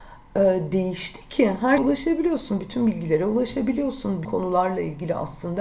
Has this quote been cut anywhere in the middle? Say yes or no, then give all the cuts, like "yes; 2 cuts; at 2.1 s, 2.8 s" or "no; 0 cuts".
yes; 2 cuts; at 1.8 s, 4.2 s